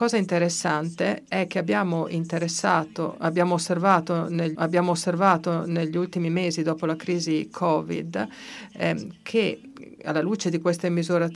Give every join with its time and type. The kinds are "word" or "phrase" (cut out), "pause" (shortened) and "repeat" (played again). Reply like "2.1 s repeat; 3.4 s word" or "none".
4.5 s repeat